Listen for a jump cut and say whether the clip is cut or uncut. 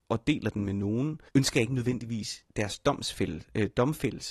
cut